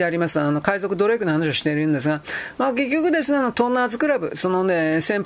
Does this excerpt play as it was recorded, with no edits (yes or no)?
yes